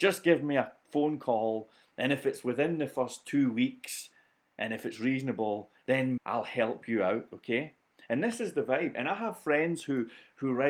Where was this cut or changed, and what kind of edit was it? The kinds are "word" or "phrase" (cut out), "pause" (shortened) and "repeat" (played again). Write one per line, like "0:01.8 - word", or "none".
0:06.2 - word